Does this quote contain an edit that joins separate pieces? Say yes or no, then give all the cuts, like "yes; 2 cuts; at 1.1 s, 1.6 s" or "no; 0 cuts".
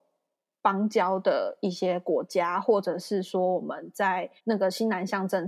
yes; 1 cut; at 4.4 s